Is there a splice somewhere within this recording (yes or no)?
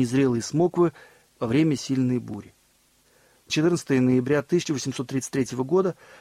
yes